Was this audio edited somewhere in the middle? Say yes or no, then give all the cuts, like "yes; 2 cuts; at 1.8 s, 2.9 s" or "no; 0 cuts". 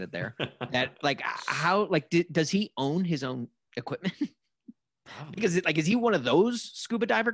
no; 0 cuts